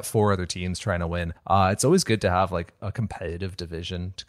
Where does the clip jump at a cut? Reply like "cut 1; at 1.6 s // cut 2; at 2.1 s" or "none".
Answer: cut 1; at 1.4 s